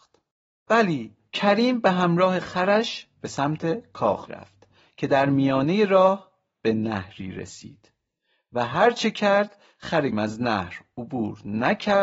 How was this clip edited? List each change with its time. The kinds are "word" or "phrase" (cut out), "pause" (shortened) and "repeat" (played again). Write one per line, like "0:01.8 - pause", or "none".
0:04.3 - word
0:10.1 - word